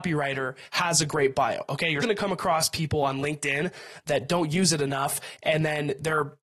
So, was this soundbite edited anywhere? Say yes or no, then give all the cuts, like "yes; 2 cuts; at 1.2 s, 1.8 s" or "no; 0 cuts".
yes; 1 cut; at 2.0 s